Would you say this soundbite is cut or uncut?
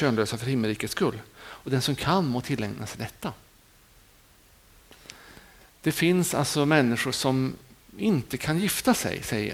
uncut